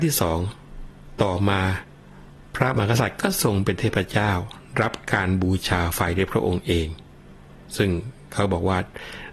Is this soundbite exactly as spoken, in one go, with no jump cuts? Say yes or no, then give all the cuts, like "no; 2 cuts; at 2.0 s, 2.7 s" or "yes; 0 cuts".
no; 1 cut; at 7.6 s